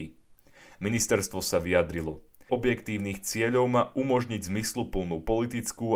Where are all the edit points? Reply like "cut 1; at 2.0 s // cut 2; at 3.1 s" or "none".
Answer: cut 1; at 2.5 s